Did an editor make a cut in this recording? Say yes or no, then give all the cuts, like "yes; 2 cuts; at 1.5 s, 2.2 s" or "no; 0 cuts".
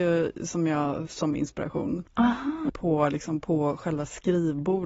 yes; 3 cuts; at 1.1 s, 2.1 s, 2.7 s